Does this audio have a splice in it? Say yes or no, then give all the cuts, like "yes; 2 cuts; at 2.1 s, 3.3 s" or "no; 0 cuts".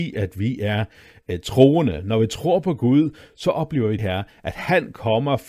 yes; 1 cut; at 4.0 s